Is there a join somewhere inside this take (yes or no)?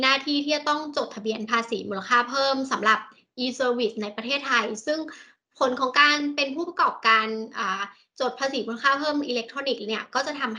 no